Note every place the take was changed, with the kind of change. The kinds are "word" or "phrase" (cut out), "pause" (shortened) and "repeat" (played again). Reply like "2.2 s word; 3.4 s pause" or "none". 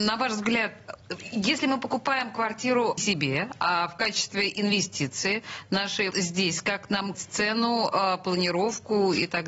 3.0 s phrase; 6.1 s word; 7.1 s word

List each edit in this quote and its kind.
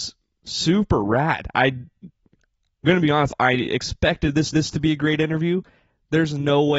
2.8 s word; 4.5 s repeat

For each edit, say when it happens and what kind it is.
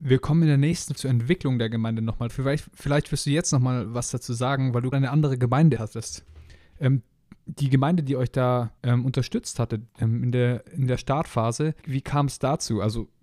1.0 s word; 2.3 s phrase; 4.9 s word; 5.8 s word; 8.8 s pause; 9.9 s pause; 11.8 s word

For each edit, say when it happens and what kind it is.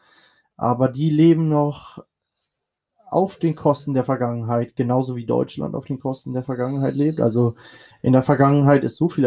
none

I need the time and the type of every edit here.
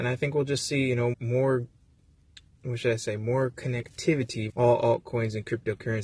1.1 s word; 4.5 s word

